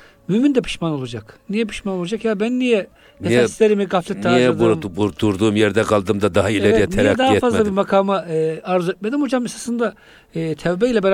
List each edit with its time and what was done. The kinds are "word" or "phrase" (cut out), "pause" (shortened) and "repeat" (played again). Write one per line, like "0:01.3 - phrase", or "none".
none